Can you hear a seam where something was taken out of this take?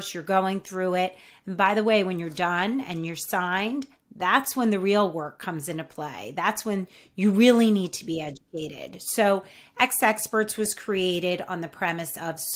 no; 0 cuts

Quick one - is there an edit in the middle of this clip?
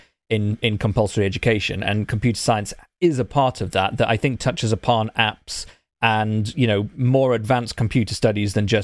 no; 0 cuts

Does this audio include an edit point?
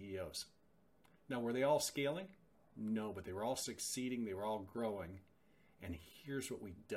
no; 0 cuts

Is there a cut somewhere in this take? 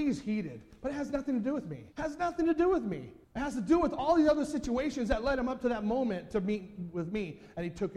yes; 2 cuts; at 1.9 s, 3.2 s

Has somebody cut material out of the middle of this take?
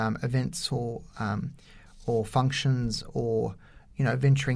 no; 0 cuts

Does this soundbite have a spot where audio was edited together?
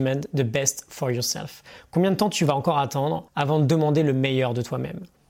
yes; 1 cut; at 3.3 s

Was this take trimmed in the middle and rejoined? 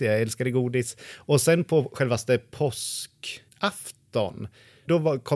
no; 0 cuts

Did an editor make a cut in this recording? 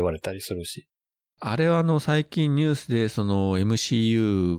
no; 0 cuts

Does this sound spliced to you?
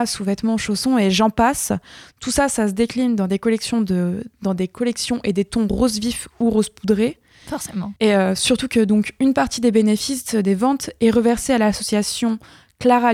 yes; 1 cut; at 8.0 s

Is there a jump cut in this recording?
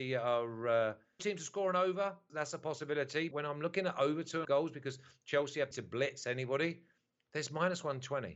yes; 5 cuts; at 1.2 s, 2.3 s, 3.3 s, 4.4 s, 5.7 s

